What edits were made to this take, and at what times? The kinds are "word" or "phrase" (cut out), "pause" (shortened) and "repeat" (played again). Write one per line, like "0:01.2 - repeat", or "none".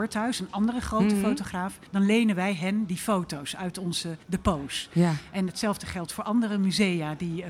0:01.9 - pause
0:04.2 - pause